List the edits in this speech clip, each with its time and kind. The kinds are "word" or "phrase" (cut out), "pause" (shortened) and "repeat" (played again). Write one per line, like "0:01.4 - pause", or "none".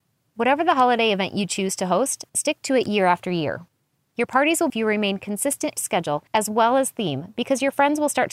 0:02.3 - pause
0:04.7 - phrase
0:05.8 - word
0:06.3 - pause